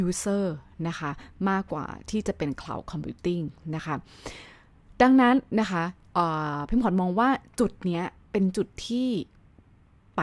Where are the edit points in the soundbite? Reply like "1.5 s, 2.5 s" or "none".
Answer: none